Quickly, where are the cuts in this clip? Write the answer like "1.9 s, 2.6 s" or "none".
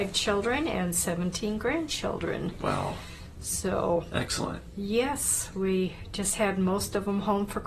none